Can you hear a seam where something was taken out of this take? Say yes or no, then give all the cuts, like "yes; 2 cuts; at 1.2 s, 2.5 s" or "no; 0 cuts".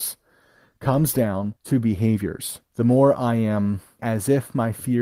yes; 3 cuts; at 1.6 s, 2.6 s, 4.0 s